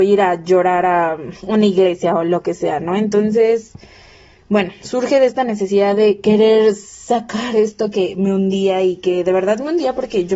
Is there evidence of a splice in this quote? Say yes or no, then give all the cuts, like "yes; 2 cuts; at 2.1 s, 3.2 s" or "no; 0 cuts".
yes; 1 cut; at 1.4 s